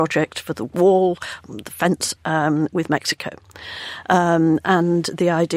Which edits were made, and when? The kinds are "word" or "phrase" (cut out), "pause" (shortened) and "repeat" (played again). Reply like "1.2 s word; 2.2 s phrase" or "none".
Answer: none